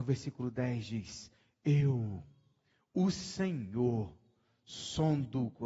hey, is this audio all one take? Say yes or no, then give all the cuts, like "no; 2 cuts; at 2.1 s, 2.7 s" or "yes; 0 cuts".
yes; 0 cuts